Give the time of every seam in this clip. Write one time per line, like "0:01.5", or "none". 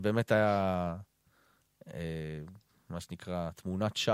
none